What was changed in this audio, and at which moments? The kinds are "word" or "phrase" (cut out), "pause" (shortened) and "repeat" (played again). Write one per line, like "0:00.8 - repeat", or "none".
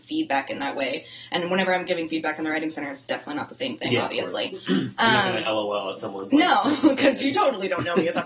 none

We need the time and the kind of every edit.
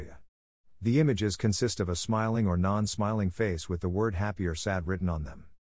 none

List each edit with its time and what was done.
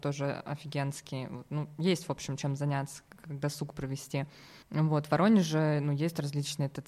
0:04.6 - pause

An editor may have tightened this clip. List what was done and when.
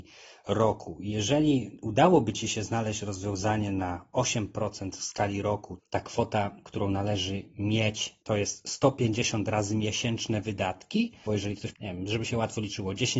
0:05.8 - word
0:08.2 - pause
0:11.3 - phrase
0:11.7 - word

